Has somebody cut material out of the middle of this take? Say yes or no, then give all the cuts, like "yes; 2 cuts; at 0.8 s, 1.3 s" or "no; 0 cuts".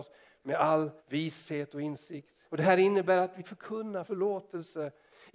yes; 4 cuts; at 1.0 s, 2.4 s, 3.4 s, 4.1 s